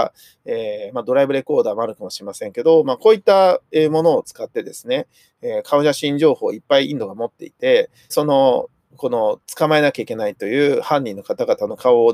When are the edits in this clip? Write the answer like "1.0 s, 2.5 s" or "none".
8.1 s, 8.9 s